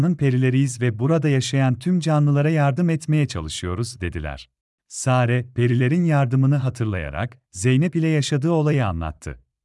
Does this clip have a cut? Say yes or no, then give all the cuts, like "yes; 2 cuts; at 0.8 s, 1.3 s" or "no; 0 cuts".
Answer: yes; 1 cut; at 4.6 s